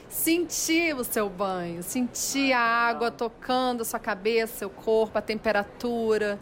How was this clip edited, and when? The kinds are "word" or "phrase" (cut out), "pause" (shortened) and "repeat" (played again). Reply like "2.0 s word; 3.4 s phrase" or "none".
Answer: none